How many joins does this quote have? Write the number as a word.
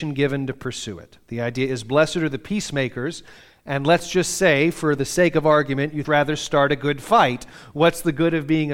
one